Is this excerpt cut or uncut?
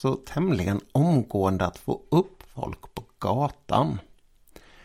uncut